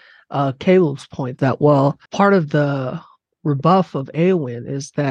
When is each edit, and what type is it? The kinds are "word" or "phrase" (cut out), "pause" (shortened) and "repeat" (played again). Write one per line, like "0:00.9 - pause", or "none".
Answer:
0:01.4 - phrase
0:02.1 - pause

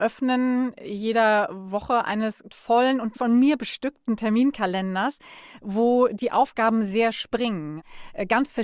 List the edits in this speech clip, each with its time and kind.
0:02.5 - word
0:03.1 - word

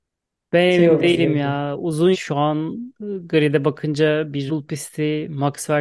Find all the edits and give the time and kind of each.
0:02.1 - phrase
0:04.5 - word

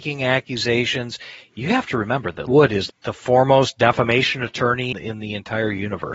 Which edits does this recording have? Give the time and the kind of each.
0:02.5 - word
0:02.9 - word
0:04.9 - word

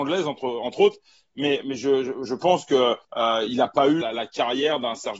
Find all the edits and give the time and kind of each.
0:01.6 - word
0:02.3 - word
0:03.0 - pause
0:04.0 - word

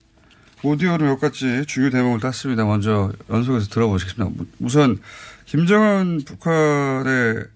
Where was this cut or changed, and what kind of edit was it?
none

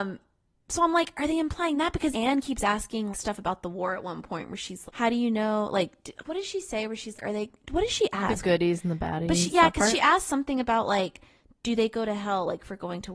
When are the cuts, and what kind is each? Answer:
0:02.1 - word
0:03.1 - word
0:04.9 - word
0:07.2 - word

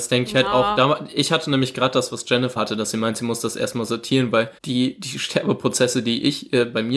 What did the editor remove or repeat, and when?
0:02.6 - word
0:04.6 - pause

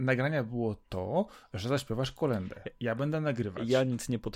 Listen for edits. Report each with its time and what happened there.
none

